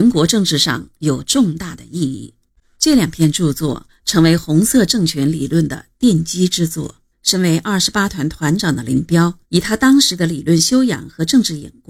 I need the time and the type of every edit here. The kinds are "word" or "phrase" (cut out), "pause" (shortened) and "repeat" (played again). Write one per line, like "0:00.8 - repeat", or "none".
0:02.5 - pause
0:07.1 - pause
0:09.4 - pause